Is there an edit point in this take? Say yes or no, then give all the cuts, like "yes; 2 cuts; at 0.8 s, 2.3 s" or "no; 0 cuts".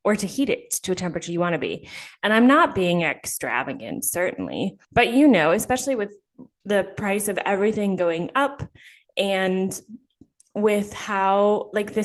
yes; 1 cut; at 4.8 s